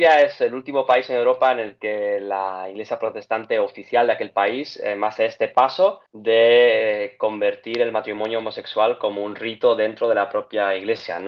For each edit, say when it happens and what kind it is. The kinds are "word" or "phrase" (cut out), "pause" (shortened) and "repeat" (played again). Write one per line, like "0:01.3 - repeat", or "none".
0:06.1 - pause